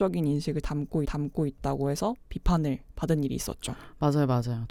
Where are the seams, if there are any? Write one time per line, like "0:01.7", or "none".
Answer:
0:01.0